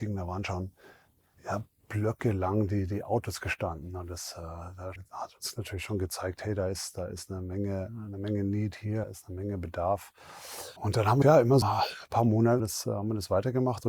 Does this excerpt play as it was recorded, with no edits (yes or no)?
no